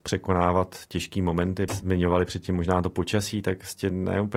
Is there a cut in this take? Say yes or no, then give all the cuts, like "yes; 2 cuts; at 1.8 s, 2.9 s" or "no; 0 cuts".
yes; 1 cut; at 1.7 s